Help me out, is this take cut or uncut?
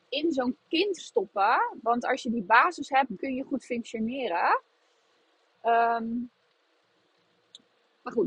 cut